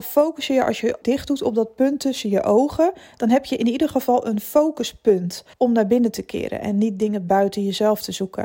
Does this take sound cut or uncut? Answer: cut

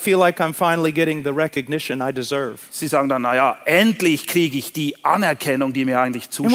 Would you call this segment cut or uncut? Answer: uncut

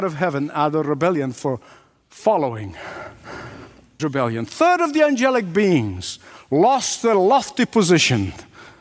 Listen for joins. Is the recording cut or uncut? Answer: cut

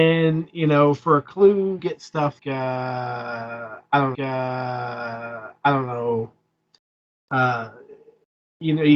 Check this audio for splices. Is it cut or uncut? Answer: cut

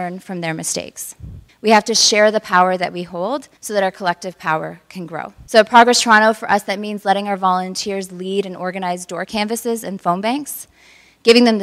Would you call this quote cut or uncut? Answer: cut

